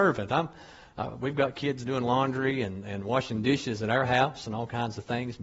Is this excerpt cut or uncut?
uncut